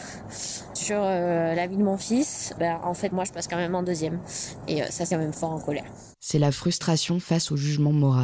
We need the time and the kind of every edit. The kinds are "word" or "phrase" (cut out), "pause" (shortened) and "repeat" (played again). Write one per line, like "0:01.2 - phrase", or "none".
0:03.1 - word
0:05.1 - phrase
0:06.1 - pause